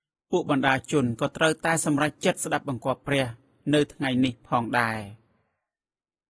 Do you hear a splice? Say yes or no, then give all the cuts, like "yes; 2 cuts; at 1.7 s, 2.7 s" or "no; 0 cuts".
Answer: no; 0 cuts